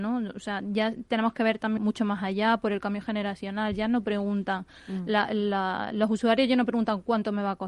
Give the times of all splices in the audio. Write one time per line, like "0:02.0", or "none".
0:01.8